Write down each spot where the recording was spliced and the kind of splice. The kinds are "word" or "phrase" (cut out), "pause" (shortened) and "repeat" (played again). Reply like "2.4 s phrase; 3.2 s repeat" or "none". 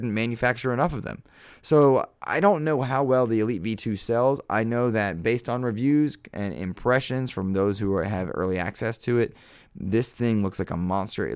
none